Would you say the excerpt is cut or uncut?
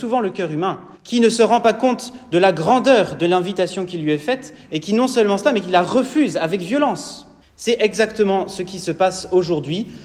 cut